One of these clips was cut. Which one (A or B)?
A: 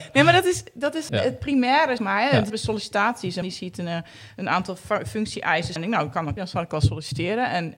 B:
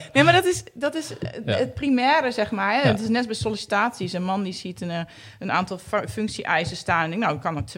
A